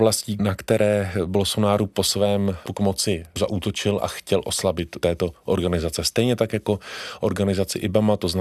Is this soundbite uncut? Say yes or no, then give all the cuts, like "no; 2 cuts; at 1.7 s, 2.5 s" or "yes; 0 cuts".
no; 2 cuts; at 2.7 s, 5.0 s